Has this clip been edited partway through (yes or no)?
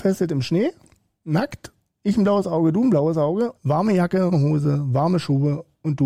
yes